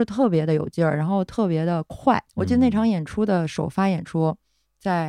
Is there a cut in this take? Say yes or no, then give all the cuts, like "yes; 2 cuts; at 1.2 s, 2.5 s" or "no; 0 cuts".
yes; 1 cut; at 2.3 s